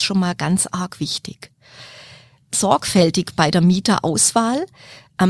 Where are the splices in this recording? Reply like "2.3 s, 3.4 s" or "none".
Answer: 2.5 s